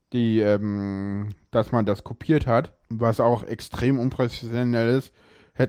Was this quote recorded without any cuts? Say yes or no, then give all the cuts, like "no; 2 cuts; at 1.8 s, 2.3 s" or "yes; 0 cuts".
no; 1 cut; at 2.8 s